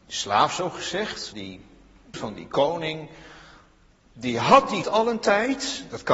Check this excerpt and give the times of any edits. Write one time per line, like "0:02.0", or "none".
0:01.3
0:02.1
0:04.8